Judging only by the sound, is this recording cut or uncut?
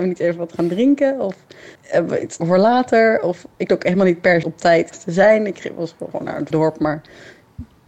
cut